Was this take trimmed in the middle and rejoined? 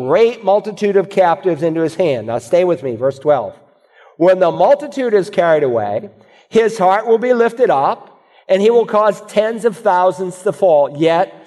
no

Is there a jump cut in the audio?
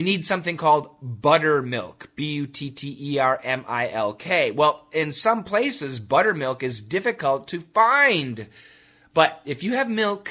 no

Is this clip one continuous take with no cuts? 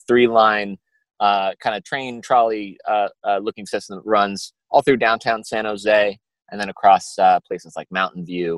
yes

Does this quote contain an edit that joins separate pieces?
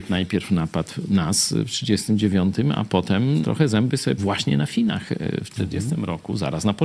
yes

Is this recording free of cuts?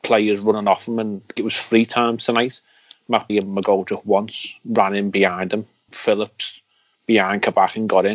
no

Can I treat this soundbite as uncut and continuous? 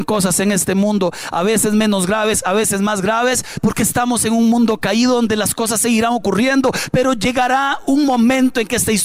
yes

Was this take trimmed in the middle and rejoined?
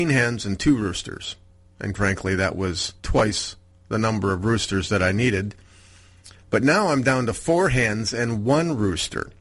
yes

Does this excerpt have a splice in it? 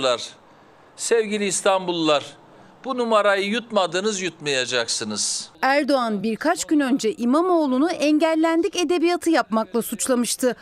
no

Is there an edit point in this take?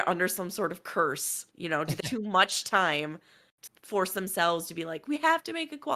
yes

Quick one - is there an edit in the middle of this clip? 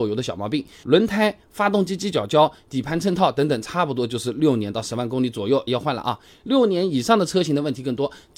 yes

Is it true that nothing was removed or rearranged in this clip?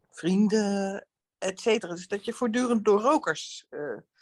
yes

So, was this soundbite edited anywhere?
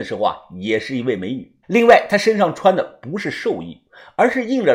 yes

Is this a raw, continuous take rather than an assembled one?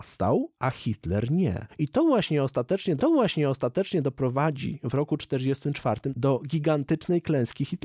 no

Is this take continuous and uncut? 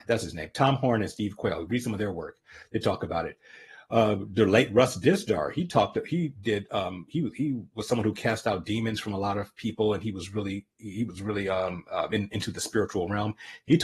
yes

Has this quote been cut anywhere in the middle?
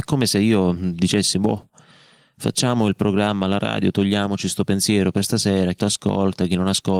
yes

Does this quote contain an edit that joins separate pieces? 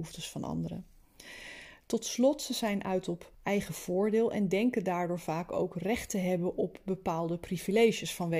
yes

